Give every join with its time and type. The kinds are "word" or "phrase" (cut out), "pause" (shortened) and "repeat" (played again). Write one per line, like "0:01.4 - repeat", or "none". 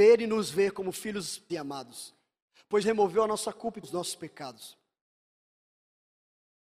0:01.5 - word
0:02.8 - word
0:03.8 - word

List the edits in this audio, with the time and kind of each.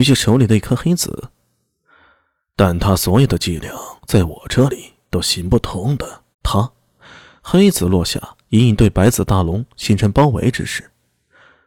0:04.0 - pause
0:05.0 - pause
0:06.3 - pause
0:08.4 - pause

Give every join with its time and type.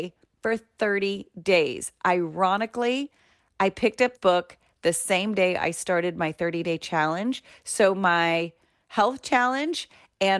0:04.2 - word

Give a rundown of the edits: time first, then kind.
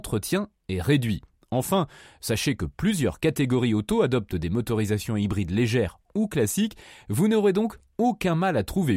none

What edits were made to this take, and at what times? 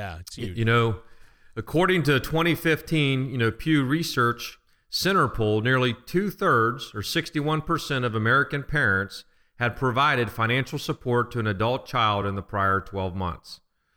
none

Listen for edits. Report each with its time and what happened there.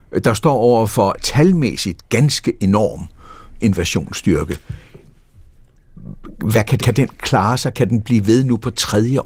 0:01.1 - word
0:03.6 - phrase
0:06.8 - word

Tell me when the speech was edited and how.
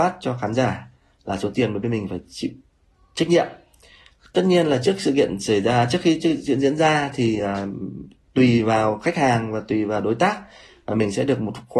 none

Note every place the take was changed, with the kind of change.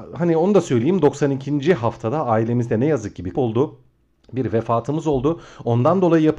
0:03.3 - word

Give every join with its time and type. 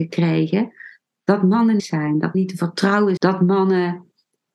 0:01.8 - phrase
0:02.3 - word
0:03.2 - word

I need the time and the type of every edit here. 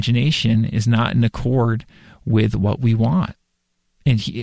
none

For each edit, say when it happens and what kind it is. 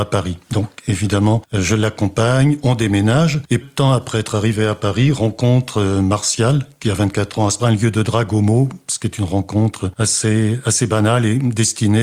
0:03.6 - word
0:07.6 - phrase

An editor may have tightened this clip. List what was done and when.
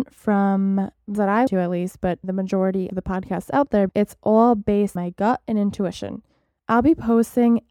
0:01.1 - word
0:01.5 - word
0:02.2 - word
0:02.9 - word
0:03.9 - word
0:05.0 - word

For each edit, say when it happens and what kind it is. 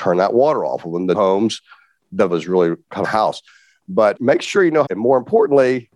0:01.1 - word
0:02.3 - word
0:03.0 - phrase
0:04.2 - word
0:04.9 - phrase

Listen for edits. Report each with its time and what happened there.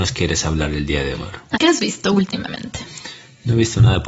0:01.1 - word
0:01.5 - word

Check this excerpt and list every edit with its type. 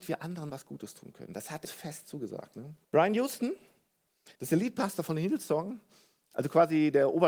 0:01.6 - word
0:02.8 - pause
0:04.3 - pause

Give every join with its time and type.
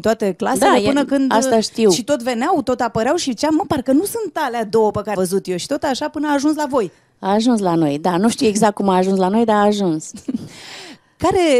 0:05.1 - word

